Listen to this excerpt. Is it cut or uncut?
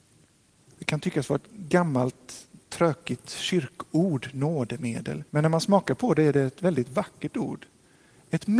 cut